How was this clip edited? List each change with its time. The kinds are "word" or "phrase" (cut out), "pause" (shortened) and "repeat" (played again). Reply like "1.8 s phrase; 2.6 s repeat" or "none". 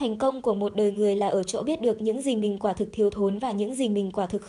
none